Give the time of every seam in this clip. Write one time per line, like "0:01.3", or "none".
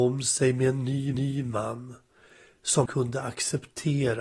0:01.1
0:02.9